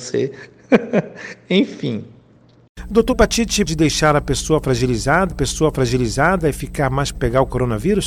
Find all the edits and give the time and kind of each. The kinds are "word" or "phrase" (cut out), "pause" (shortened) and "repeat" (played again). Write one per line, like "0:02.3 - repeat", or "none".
0:03.1 - word
0:03.7 - word
0:05.3 - repeat
0:07.1 - word